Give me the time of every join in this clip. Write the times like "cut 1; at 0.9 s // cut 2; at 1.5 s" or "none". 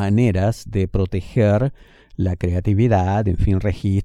none